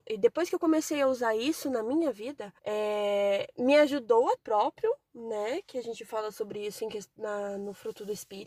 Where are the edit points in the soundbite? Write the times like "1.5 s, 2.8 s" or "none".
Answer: 2.6 s, 4.4 s